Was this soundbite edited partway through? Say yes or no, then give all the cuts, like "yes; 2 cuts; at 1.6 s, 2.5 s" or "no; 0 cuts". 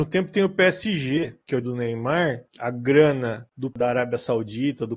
yes; 3 cuts; at 1.6 s, 2.6 s, 3.7 s